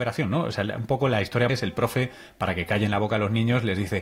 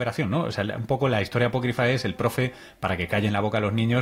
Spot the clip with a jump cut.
first; 1 cut; at 1.5 s

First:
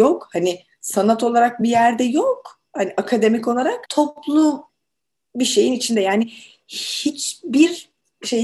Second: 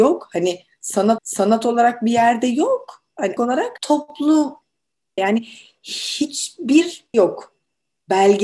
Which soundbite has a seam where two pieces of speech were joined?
second; 4 cuts; at 1.2 s, 3.4 s, 5.2 s, 7.1 s

